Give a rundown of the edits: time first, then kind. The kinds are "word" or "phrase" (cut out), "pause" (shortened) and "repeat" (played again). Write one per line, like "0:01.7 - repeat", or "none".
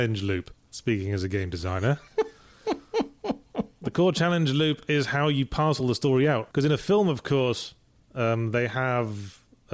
none